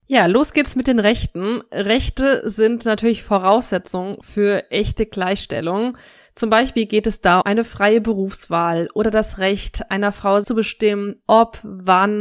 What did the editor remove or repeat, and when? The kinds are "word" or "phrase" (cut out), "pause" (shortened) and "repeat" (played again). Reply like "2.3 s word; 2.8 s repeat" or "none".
7.4 s word; 10.4 s word